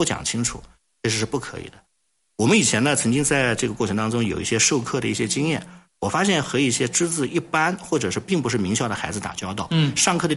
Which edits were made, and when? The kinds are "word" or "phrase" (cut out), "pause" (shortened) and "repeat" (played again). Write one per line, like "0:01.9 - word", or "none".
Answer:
none